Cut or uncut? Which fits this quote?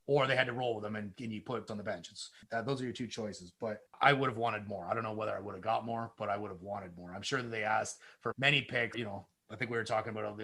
cut